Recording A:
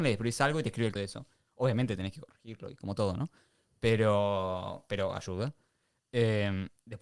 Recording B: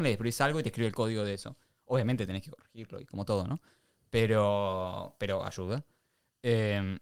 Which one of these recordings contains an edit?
A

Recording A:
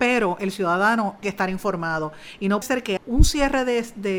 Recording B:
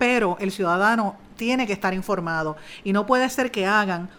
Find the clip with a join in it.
A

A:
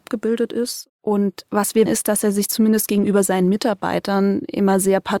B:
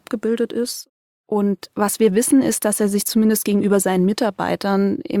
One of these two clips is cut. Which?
A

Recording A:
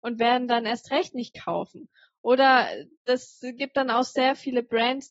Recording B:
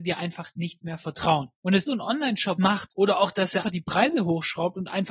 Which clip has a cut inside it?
B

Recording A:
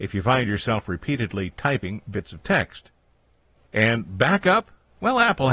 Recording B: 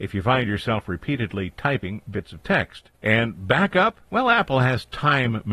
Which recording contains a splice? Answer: B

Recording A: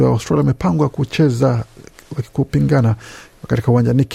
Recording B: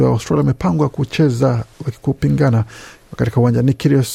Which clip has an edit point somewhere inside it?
B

